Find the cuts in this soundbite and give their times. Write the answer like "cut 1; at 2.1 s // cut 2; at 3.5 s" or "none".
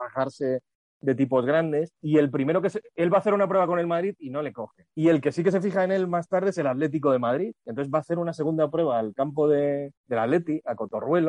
cut 1; at 2.0 s // cut 2; at 4.9 s // cut 3; at 10.0 s